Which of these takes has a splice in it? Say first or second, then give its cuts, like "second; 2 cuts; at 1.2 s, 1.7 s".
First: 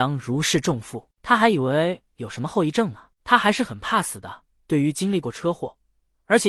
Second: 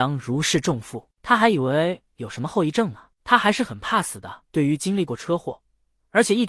second; 1 cut; at 4.5 s